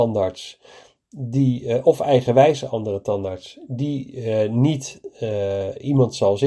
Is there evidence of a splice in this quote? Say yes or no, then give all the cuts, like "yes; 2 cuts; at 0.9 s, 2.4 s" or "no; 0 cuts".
no; 0 cuts